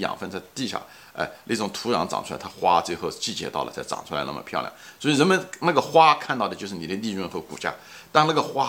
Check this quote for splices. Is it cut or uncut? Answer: uncut